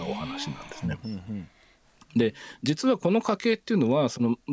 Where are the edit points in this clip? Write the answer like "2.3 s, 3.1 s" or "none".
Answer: none